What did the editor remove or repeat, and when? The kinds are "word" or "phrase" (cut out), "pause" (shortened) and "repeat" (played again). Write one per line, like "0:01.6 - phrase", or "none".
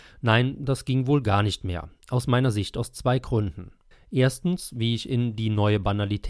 0:03.9 - pause

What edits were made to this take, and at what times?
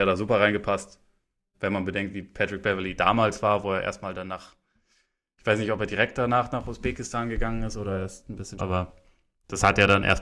0:08.6 - word

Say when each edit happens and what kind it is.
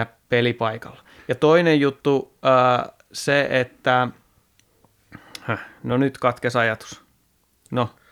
none

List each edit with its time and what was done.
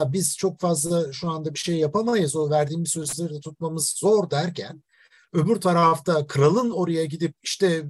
none

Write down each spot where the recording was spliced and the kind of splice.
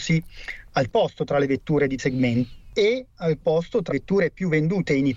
0:00.9 - word
0:02.0 - word
0:03.4 - word
0:03.9 - word

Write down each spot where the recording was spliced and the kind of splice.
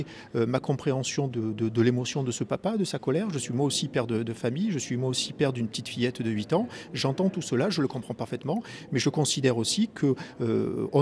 0:01.3 - word

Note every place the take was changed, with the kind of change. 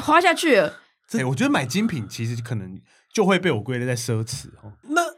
0:01.2 - word

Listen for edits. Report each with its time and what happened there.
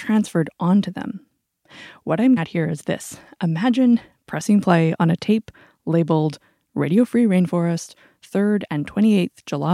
0:02.4 - word

